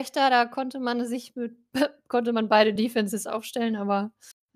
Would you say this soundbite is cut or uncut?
uncut